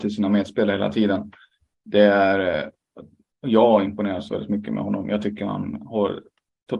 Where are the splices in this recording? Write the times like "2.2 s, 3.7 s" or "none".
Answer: none